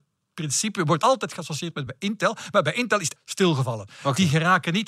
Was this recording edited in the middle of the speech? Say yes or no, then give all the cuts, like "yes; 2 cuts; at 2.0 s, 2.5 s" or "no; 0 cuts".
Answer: yes; 3 cuts; at 1.0 s, 1.9 s, 3.2 s